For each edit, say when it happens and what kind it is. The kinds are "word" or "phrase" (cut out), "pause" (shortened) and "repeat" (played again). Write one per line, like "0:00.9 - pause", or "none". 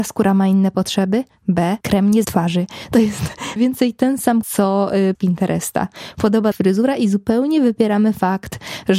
0:01.8 - pause
0:02.2 - phrase
0:03.6 - word
0:04.4 - word
0:05.1 - phrase
0:06.5 - phrase